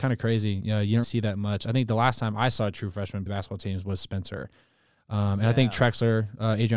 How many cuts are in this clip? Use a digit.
2